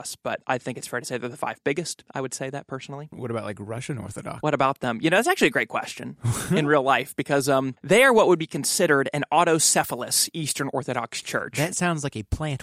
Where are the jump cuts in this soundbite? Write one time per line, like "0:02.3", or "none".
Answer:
none